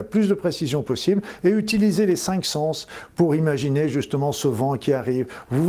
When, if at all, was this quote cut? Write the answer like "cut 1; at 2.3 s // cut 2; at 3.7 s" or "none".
none